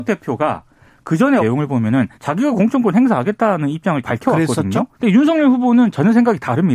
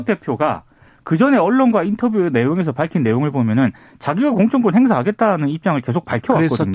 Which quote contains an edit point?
first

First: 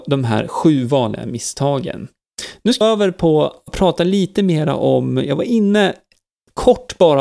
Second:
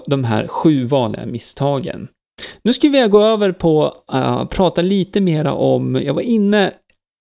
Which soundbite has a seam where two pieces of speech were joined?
first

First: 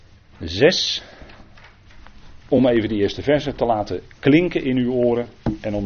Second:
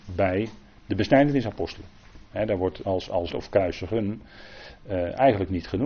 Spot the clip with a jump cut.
second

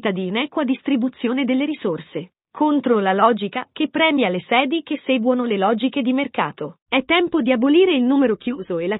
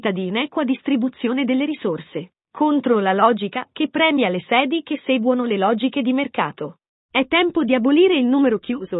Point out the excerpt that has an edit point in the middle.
first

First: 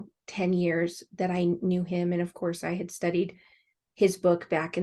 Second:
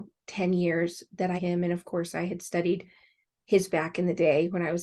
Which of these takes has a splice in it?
second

